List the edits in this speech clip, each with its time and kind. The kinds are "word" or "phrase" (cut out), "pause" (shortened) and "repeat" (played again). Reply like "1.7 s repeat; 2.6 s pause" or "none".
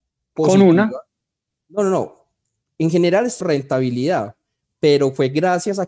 3.4 s word